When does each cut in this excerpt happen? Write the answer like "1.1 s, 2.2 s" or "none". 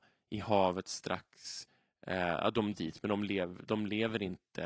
2.8 s